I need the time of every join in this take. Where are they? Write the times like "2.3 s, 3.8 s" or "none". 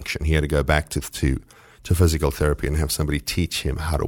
none